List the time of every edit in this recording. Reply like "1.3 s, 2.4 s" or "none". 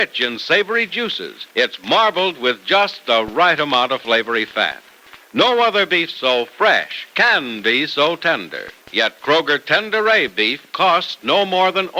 1.5 s, 5.2 s, 8.8 s